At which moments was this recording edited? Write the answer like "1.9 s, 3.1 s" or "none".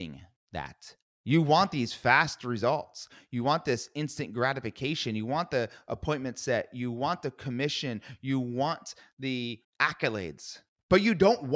1.1 s, 9.6 s